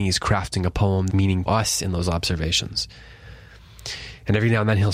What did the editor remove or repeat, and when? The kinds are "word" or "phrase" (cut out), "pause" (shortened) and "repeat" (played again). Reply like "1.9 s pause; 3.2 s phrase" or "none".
1.1 s phrase; 1.5 s word